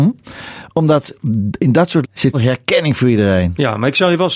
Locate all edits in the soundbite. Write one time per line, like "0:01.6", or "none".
0:02.0
0:02.3